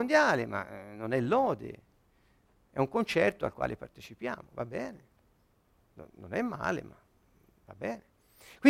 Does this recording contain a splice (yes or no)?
no